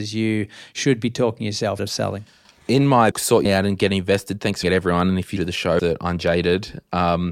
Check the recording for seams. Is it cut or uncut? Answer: cut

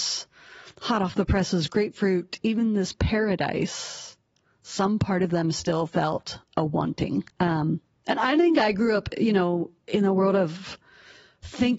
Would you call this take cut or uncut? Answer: cut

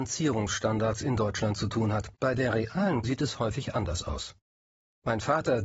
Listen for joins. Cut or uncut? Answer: cut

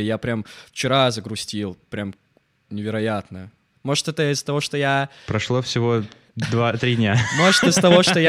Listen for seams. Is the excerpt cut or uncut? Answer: uncut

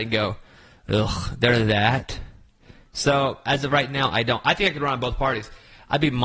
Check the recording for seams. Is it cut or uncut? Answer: uncut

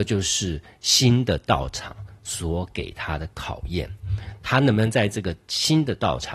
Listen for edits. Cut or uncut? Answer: uncut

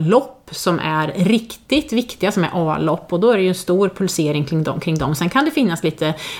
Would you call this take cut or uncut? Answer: uncut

